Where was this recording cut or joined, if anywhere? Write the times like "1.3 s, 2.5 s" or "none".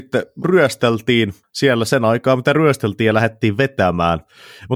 1.4 s